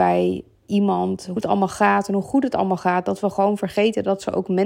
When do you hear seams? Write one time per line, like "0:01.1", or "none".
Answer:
0:01.4